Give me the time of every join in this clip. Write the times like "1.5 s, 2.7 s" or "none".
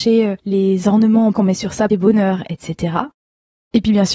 1.3 s, 1.9 s